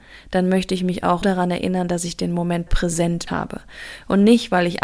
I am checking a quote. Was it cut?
yes; 3 cuts; at 1.2 s, 2.7 s, 3.3 s

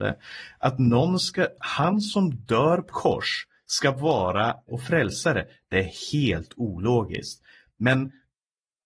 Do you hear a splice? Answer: yes; 3 cuts; at 1.6 s, 2.9 s, 4.7 s

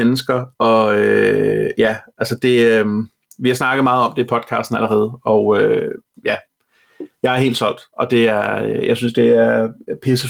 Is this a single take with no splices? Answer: yes; 0 cuts

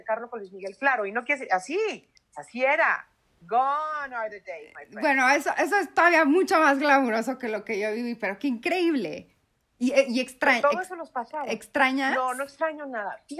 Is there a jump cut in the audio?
no; 0 cuts

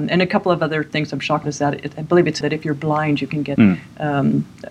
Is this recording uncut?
no; 3 cuts; at 1.4 s, 2.4 s, 3.6 s

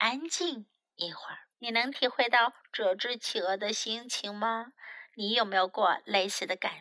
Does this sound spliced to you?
yes; 1 cut; at 1.5 s

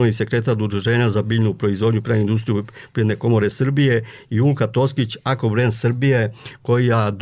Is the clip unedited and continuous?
yes; 0 cuts

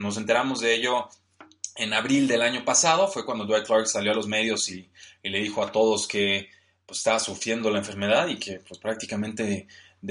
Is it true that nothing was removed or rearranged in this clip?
yes; 0 cuts

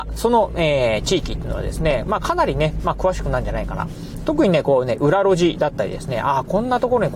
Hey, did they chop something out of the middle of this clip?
no; 0 cuts

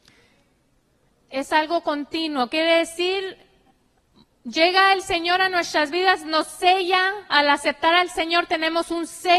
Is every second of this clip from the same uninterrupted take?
yes; 0 cuts

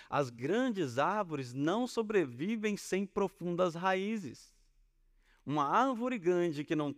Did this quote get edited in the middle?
no; 0 cuts

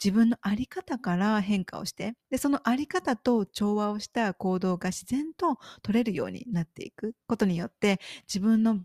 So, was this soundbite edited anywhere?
yes; 2 cuts; at 2.2 s, 7.2 s

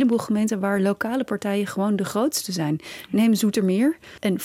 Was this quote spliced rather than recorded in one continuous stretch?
no; 0 cuts

